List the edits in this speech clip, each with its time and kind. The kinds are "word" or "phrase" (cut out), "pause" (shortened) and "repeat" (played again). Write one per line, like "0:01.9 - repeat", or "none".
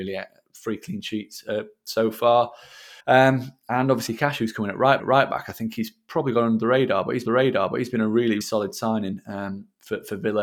0:03.0 - pause
0:04.1 - word
0:05.0 - repeat
0:07.3 - repeat
0:08.4 - word